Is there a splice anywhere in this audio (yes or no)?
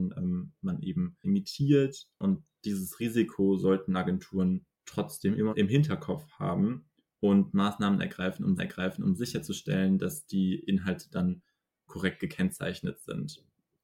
yes